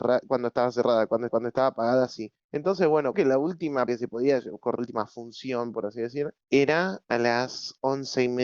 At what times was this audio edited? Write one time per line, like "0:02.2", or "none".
0:01.3
0:02.4
0:03.1
0:03.9
0:04.8
0:06.4